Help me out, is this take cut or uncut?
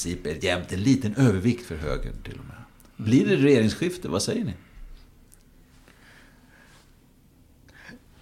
uncut